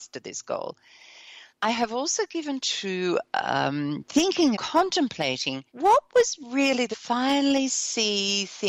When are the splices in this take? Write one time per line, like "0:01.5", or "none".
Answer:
0:01.5
0:02.6
0:04.5
0:05.7
0:06.9